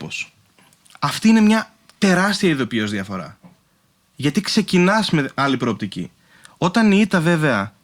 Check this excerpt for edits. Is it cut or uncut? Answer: uncut